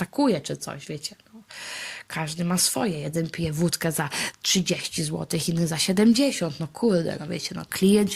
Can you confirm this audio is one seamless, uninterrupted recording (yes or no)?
yes